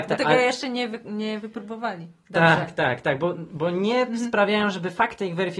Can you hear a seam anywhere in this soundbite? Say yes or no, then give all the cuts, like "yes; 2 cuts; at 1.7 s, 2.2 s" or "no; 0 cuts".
no; 0 cuts